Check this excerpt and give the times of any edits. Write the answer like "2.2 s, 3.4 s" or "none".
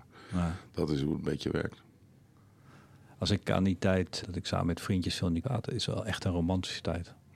3.5 s, 4.2 s, 5.4 s

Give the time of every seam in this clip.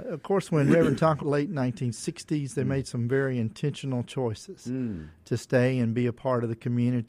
1.2 s

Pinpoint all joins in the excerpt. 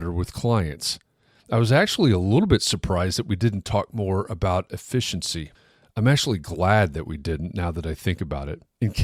none

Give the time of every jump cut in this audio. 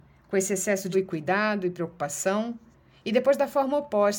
0.9 s

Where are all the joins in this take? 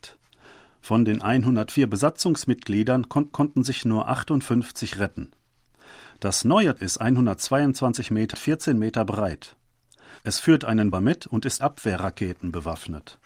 3.3 s, 6.8 s, 8.3 s, 10.2 s, 10.9 s, 11.6 s

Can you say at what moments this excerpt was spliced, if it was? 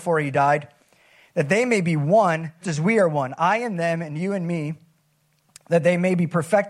2.6 s

